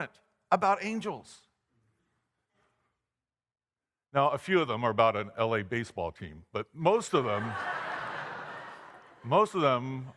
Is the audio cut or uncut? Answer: uncut